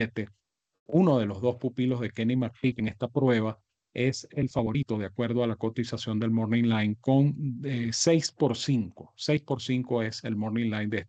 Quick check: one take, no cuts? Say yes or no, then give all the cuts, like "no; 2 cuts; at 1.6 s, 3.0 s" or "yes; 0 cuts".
yes; 0 cuts